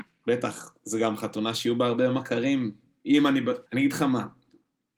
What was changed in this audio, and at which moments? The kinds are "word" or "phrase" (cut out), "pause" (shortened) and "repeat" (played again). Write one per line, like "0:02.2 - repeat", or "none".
0:03.7 - pause